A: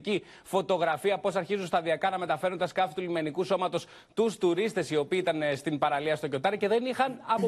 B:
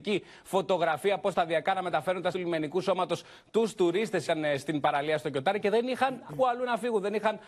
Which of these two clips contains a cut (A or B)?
B